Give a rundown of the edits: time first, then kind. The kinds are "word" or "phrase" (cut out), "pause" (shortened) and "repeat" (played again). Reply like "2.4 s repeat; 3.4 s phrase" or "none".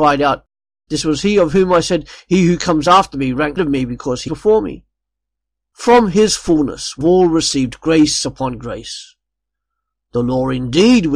3.6 s word; 4.3 s word; 7.0 s word